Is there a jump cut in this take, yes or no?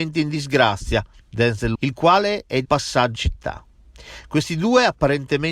yes